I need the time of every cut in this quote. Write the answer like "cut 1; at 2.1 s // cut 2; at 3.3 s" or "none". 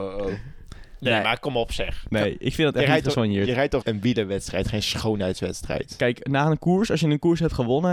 cut 1; at 3.8 s

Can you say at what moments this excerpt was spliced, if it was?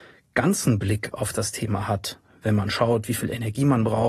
none

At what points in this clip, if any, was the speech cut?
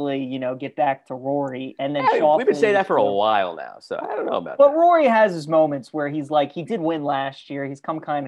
none

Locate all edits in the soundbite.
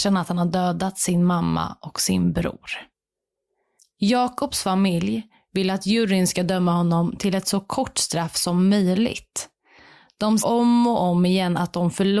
cut 1; at 10.4 s

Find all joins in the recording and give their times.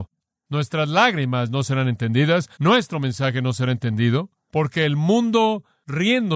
cut 1; at 2.5 s

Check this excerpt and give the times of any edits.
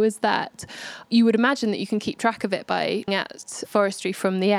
cut 1; at 3.1 s

